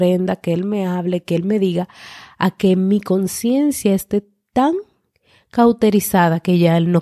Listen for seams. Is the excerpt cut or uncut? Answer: uncut